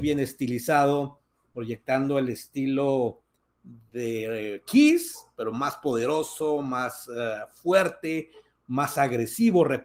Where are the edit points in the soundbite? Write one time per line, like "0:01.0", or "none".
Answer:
none